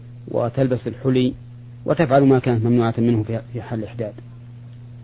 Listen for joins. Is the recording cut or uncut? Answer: uncut